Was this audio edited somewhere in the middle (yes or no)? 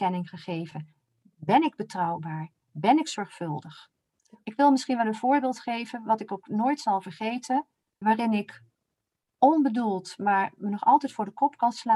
yes